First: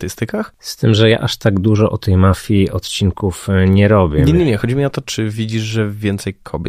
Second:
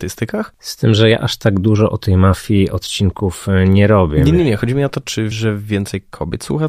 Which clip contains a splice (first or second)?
second